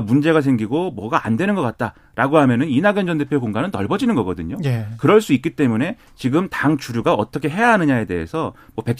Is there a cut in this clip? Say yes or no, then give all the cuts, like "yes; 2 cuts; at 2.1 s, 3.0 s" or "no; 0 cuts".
no; 0 cuts